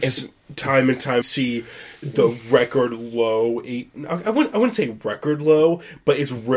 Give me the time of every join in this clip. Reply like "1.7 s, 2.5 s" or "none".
1.2 s